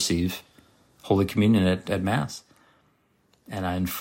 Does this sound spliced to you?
no; 0 cuts

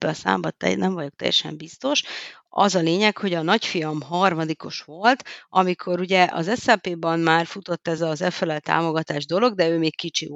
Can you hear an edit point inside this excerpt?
no; 0 cuts

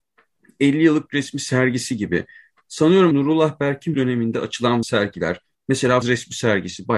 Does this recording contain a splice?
yes; 5 cuts; at 1.1 s, 3.1 s, 3.9 s, 4.8 s, 6.0 s

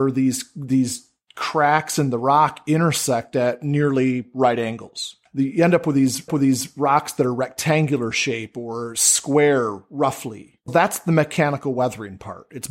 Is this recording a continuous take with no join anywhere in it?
no; 2 cuts; at 6.3 s, 10.7 s

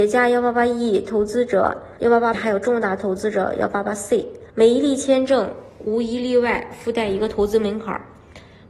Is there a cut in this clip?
yes; 3 cuts; at 2.0 s, 2.3 s, 4.5 s

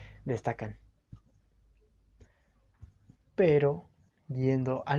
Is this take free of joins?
yes; 0 cuts

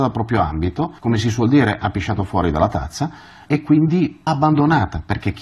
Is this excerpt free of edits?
no; 3 cuts; at 1.0 s, 3.5 s, 4.3 s

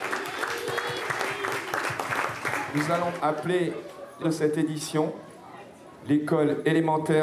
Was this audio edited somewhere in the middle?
yes; 2 cuts; at 3.2 s, 4.2 s

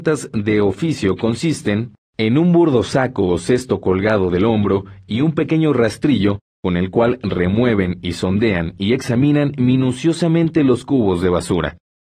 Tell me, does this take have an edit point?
no; 0 cuts

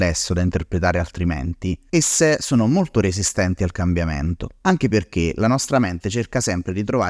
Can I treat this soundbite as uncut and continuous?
yes; 0 cuts

